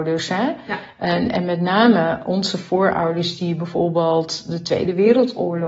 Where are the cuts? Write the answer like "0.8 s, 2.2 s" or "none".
none